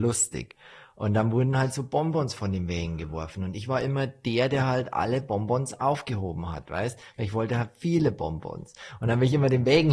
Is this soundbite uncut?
yes; 0 cuts

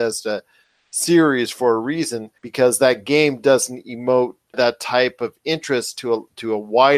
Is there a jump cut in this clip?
yes; 1 cut; at 2.4 s

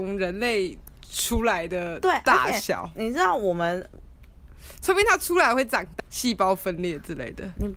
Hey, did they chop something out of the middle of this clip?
yes; 1 cut; at 6.0 s

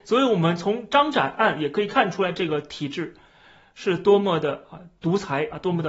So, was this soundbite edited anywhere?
no; 0 cuts

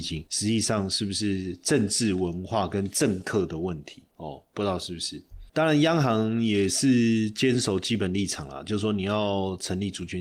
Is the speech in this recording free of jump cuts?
no; 1 cut; at 5.5 s

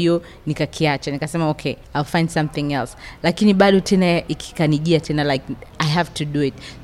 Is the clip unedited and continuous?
yes; 0 cuts

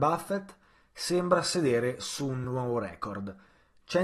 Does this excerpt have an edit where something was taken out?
no; 0 cuts

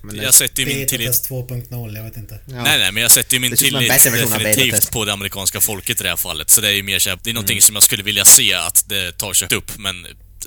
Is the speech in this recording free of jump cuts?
no; 2 cuts; at 7.2 s, 9.5 s

